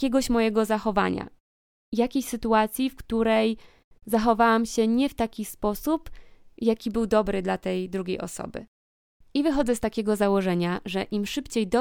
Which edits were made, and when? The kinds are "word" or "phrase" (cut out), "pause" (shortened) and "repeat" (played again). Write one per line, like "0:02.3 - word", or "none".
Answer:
none